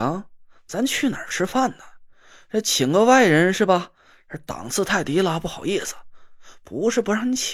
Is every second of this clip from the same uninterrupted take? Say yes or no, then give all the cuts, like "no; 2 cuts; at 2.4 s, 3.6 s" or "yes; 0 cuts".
yes; 0 cuts